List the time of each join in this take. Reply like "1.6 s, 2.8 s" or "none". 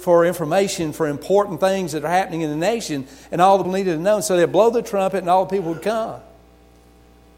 3.6 s